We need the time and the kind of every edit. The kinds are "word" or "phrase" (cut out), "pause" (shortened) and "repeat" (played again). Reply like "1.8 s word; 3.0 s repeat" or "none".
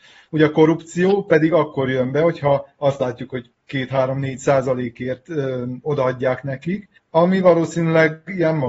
7.0 s pause